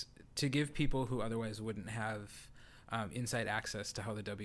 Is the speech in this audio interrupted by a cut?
no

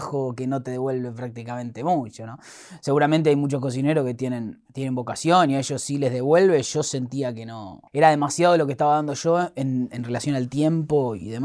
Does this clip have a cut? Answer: yes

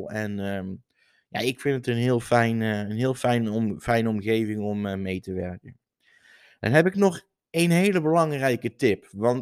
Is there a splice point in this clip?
no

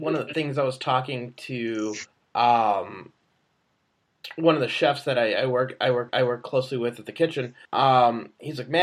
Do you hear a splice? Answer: yes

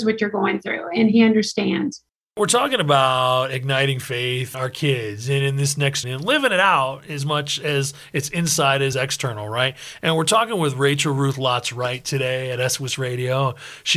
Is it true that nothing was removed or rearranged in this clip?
no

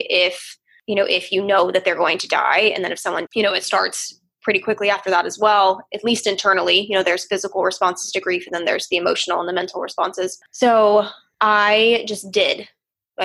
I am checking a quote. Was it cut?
yes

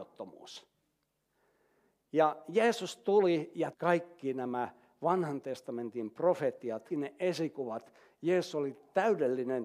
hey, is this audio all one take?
no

